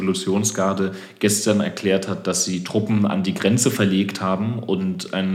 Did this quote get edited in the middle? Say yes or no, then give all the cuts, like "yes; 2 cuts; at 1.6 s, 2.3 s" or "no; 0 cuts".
no; 0 cuts